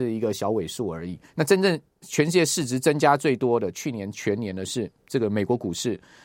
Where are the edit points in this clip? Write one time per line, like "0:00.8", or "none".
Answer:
0:01.3